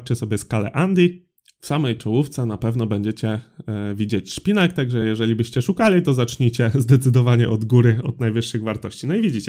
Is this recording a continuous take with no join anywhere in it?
yes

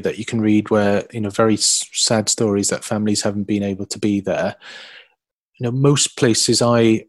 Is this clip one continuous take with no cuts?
yes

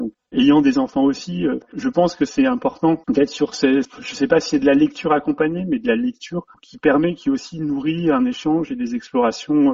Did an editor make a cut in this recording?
no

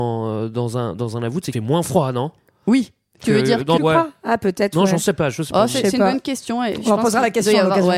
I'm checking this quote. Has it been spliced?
yes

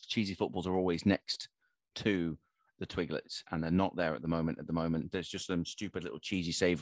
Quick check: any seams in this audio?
no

